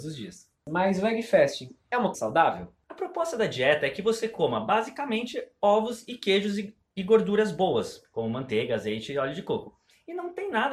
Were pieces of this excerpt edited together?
yes; 1 cut; at 2.1 s

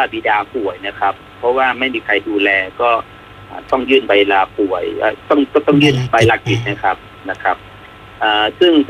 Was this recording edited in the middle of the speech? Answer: yes; 1 cut; at 5.2 s

